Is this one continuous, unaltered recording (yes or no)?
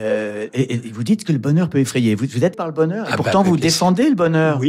no